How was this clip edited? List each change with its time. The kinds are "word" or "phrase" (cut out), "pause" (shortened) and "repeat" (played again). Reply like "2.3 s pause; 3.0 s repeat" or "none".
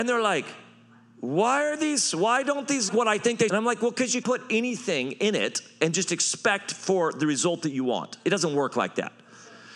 2.9 s phrase; 3.5 s phrase; 4.2 s word